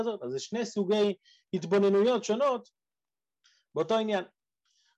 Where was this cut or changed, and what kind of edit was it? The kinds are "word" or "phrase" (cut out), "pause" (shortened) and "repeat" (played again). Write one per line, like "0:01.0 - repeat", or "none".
none